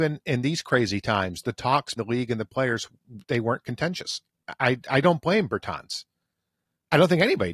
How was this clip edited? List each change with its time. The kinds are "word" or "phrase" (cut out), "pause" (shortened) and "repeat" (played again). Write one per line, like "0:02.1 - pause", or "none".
0:02.0 - word
0:04.6 - word